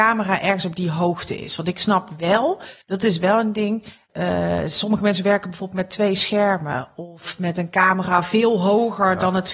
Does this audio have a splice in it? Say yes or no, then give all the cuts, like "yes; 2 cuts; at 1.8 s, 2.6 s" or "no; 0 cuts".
yes; 1 cut; at 2.8 s